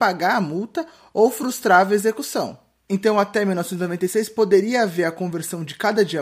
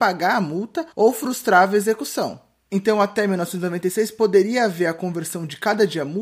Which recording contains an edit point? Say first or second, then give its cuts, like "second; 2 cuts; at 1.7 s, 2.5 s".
second; 1 cut; at 0.9 s